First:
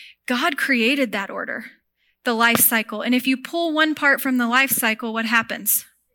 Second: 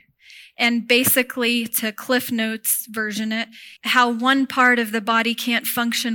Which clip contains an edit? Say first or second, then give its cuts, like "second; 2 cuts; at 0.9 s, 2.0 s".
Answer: second; 1 cut; at 3.8 s